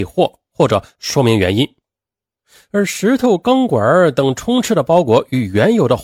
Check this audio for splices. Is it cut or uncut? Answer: uncut